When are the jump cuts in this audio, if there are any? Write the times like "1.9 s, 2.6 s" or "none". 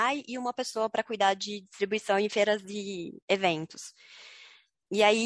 3.2 s